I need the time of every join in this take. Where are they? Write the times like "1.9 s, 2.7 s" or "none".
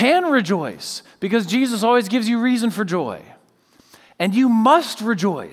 none